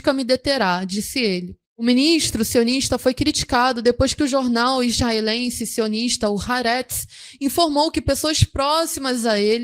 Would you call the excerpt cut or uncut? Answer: cut